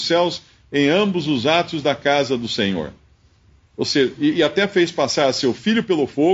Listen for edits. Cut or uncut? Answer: uncut